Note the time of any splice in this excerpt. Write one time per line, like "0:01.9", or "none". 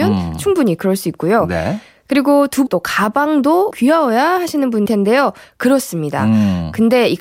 0:02.7
0:03.7
0:04.9